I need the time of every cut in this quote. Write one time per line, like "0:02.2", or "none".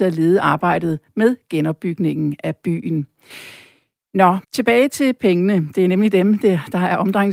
0:04.4